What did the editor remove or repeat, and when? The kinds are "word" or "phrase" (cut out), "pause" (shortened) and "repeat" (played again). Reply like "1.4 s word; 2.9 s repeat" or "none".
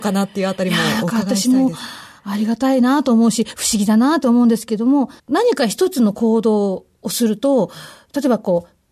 5.2 s pause